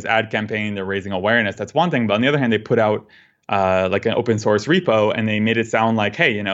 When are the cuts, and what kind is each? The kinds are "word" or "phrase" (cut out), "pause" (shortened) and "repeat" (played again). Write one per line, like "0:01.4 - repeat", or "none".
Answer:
none